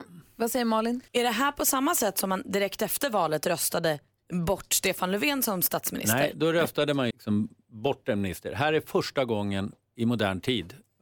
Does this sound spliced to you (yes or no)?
yes